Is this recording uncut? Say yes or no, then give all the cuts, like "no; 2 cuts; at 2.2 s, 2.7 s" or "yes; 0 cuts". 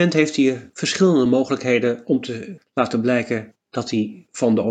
yes; 0 cuts